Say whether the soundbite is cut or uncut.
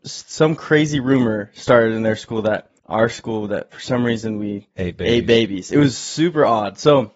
cut